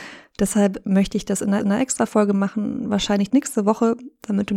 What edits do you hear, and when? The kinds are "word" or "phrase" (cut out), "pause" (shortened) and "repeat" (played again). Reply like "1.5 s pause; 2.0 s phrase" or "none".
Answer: 1.6 s repeat; 3.3 s word